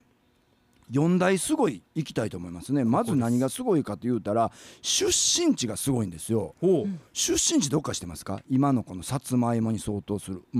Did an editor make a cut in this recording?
yes; 1 cut; at 1.9 s

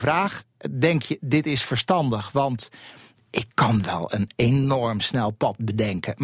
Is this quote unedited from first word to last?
yes; 0 cuts

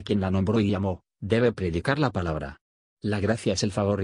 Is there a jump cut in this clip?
no; 0 cuts

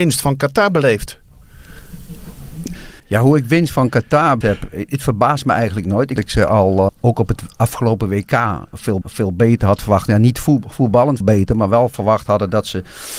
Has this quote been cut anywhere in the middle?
yes; 6 cuts; at 3.0 s, 4.4 s, 6.2 s, 6.9 s, 9.0 s, 11.2 s

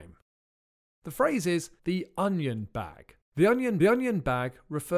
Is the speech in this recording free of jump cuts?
no; 3 cuts; at 1.8 s, 3.2 s, 3.8 s

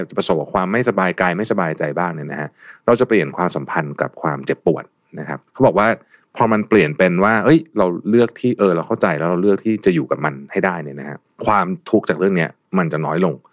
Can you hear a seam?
yes; 1 cut; at 5.5 s

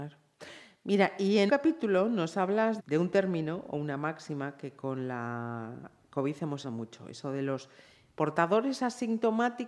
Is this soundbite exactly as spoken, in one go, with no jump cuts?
no; 3 cuts; at 1.5 s, 2.8 s, 6.6 s

